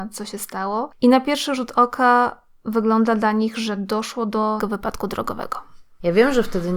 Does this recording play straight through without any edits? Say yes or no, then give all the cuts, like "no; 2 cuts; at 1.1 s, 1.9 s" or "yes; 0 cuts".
no; 1 cut; at 4.6 s